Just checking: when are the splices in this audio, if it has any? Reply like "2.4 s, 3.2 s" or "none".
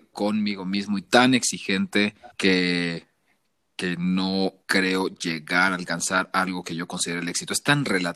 2.3 s, 4.6 s